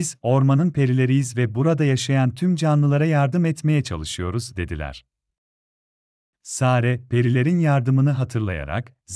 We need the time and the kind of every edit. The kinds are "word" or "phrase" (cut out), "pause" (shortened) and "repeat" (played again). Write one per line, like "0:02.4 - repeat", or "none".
none